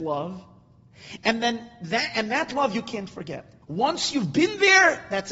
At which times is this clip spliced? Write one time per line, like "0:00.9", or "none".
0:03.6